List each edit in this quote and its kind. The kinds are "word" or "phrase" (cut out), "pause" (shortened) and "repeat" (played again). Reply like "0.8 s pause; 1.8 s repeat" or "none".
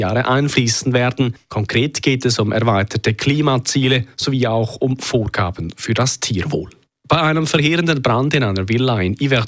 6.9 s pause